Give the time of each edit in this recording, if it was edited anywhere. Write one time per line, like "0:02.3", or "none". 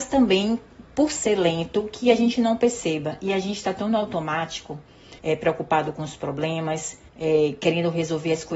0:05.2
0:07.1